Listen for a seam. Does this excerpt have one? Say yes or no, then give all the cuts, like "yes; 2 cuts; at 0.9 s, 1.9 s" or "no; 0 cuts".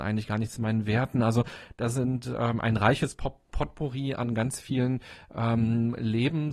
no; 0 cuts